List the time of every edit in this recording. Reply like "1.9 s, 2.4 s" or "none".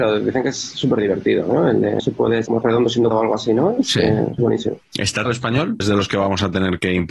2.0 s, 2.5 s, 3.1 s, 4.4 s, 5.3 s, 5.8 s